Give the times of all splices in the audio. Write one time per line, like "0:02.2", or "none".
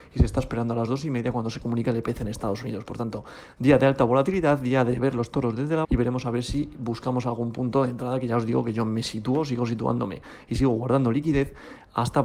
0:05.8